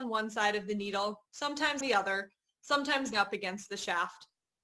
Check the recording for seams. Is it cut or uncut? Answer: cut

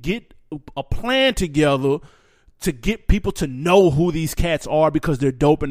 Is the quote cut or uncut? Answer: uncut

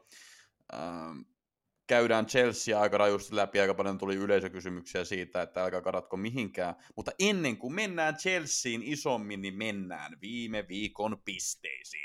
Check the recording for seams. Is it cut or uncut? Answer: uncut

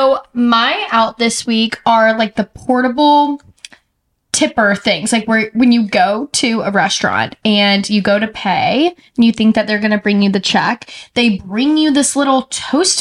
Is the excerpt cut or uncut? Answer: uncut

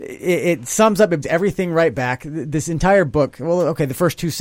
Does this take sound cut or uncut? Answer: cut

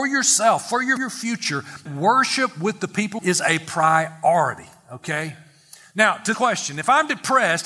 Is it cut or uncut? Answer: cut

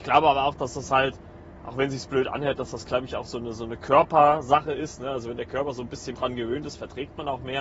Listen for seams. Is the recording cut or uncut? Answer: cut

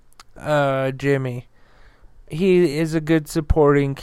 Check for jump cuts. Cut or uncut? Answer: uncut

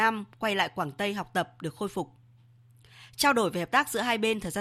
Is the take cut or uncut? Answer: uncut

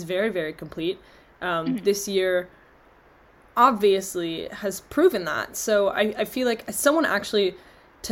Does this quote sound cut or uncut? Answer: uncut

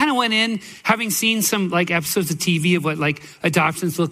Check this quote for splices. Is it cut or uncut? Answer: uncut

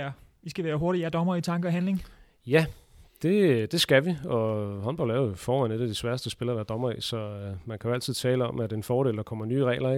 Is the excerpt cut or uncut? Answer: uncut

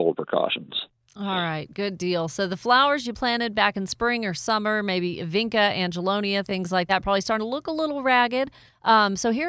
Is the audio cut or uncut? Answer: uncut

